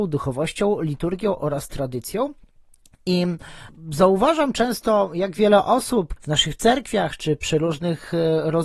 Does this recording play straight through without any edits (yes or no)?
no